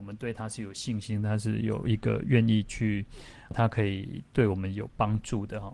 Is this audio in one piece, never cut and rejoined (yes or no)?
no